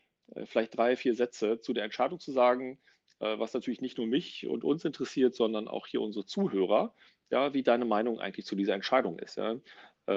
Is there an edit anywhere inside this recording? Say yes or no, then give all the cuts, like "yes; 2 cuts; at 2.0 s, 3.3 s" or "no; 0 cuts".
no; 0 cuts